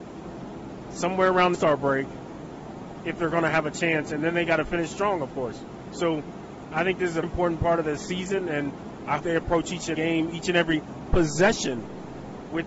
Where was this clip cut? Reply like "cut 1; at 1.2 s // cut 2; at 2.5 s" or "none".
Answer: cut 1; at 1.5 s // cut 2; at 7.2 s // cut 3; at 9.2 s // cut 4; at 9.9 s